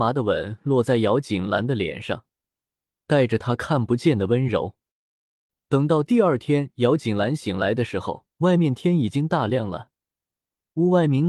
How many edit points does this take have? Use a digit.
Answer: 1